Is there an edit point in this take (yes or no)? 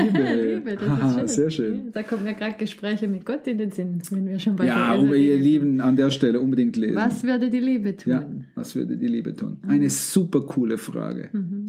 no